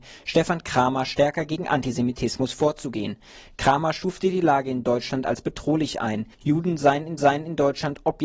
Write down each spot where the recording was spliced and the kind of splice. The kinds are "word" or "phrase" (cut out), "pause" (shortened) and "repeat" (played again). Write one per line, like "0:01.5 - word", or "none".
0:06.3 - pause
0:07.2 - repeat

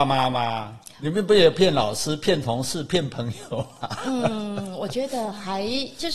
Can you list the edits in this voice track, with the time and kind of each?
0:00.9 - pause

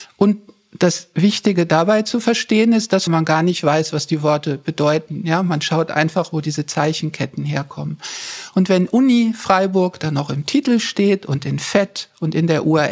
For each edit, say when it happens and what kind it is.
0:03.1 - phrase

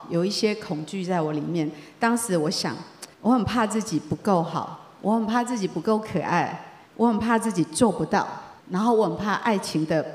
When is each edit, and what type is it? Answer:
0:03.1 - pause
0:06.9 - pause
0:08.6 - pause

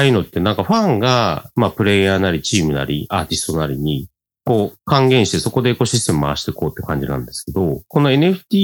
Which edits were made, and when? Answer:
none

